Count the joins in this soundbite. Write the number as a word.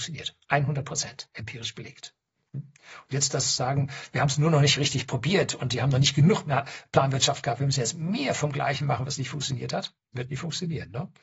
one